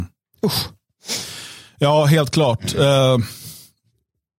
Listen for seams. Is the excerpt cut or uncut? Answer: uncut